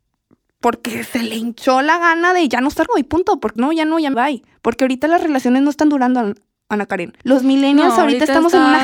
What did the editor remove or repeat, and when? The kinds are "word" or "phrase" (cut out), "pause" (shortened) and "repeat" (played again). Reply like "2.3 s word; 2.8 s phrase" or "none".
2.9 s word; 3.6 s word; 4.1 s phrase; 7.2 s pause